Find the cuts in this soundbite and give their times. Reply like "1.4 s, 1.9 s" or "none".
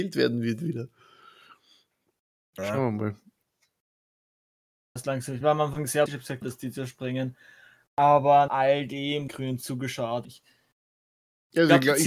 5.0 s, 5.4 s, 6.1 s, 6.4 s, 8.5 s, 9.3 s, 10.2 s